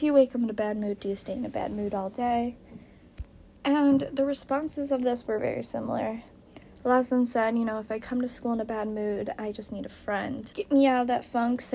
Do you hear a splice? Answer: yes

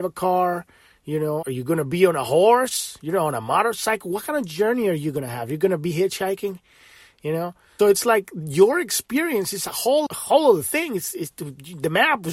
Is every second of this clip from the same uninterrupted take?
no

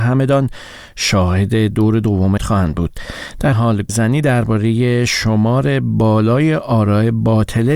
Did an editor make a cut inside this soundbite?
yes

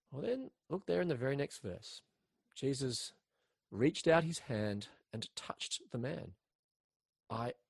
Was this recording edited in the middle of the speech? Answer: no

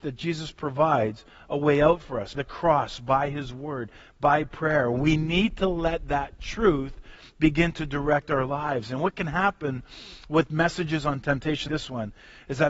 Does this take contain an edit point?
yes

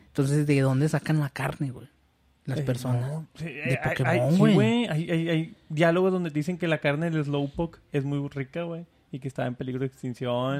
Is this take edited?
no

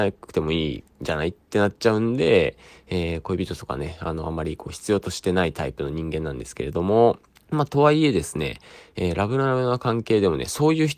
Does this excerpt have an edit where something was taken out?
yes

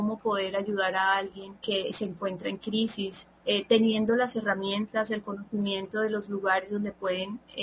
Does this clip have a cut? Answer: yes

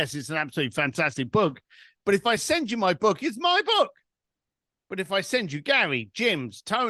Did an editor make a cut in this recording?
no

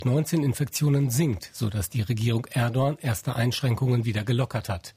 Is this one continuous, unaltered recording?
yes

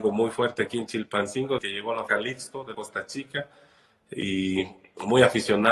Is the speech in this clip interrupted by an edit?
yes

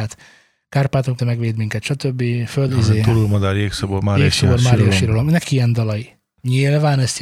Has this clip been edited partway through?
yes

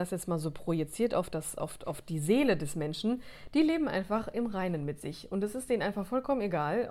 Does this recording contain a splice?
no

